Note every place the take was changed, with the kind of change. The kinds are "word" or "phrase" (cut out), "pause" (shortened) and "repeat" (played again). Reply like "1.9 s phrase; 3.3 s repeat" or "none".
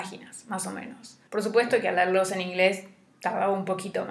1.3 s pause